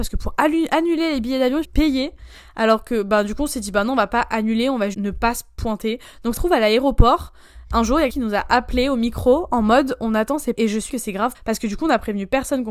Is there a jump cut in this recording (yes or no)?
yes